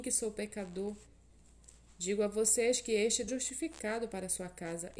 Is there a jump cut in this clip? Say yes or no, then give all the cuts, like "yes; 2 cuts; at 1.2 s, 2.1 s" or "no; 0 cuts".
yes; 1 cut; at 3.3 s